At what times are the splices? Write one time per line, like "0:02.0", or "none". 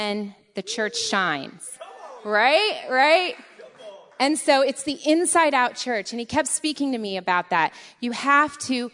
none